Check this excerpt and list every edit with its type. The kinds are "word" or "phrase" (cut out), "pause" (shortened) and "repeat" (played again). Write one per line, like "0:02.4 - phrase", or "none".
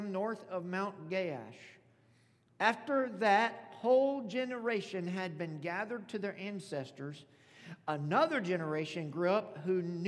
none